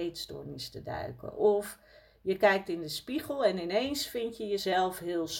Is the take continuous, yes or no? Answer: yes